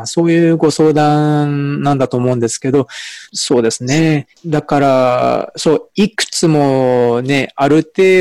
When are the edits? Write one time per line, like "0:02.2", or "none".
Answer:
0:03.3